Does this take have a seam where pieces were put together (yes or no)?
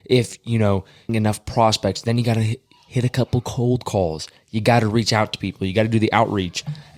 yes